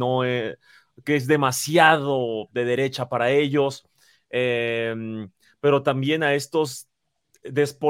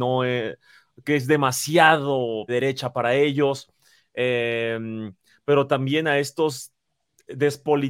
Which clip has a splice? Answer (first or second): second